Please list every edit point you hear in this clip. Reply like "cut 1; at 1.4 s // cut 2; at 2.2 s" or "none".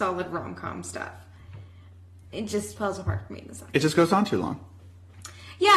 cut 1; at 2.8 s